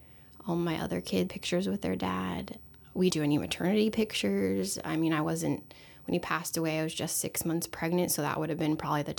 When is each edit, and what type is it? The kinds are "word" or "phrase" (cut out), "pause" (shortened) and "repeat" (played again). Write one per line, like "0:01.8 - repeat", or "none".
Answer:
0:01.3 - word
0:03.1 - word